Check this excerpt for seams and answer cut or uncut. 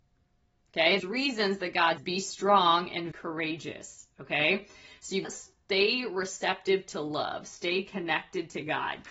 cut